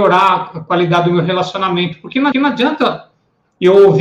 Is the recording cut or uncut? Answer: cut